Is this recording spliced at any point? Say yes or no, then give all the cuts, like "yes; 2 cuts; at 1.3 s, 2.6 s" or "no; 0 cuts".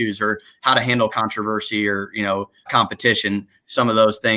yes; 2 cuts; at 1.1 s, 2.7 s